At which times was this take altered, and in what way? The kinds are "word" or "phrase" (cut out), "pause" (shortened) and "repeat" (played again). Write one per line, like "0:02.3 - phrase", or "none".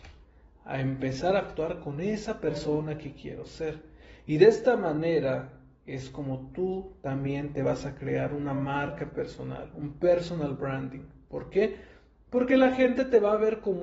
none